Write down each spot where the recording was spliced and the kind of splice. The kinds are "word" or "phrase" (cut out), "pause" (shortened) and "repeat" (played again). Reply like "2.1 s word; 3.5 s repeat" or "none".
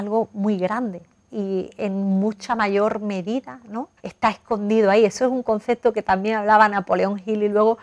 4.0 s pause